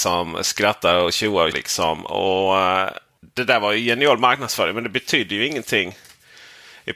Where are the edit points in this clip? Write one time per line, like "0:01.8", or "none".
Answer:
0:01.5

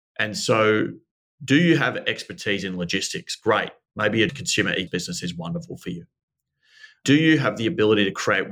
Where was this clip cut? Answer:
0:04.3
0:04.9

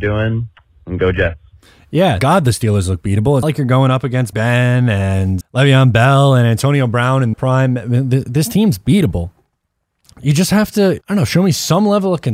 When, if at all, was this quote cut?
0:02.2
0:03.4
0:04.3
0:05.4
0:07.3
0:11.0

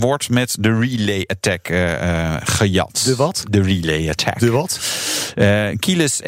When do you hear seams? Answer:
none

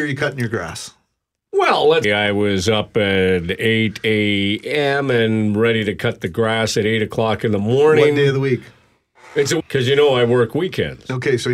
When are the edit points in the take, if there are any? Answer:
0:02.0
0:09.6

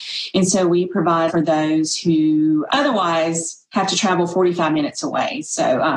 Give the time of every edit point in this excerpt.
0:01.3
0:02.7

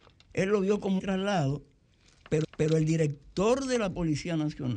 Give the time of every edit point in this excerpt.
0:01.0
0:02.4

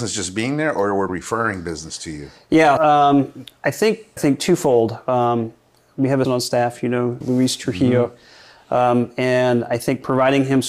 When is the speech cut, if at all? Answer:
0:01.1
0:02.8
0:04.2
0:06.2
0:07.2

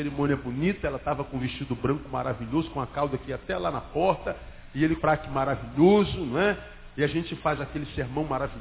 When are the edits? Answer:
0:05.0

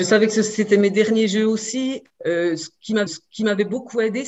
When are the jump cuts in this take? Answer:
0:03.1

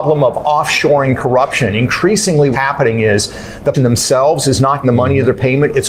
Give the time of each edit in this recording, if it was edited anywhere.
0:02.5
0:03.7
0:04.8

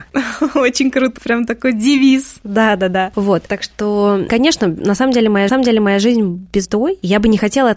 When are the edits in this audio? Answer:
0:01.2
0:04.3
0:05.5
0:06.6

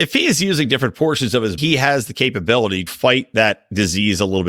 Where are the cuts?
0:01.6
0:02.9

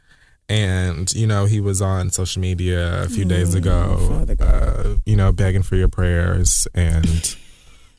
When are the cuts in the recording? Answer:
none

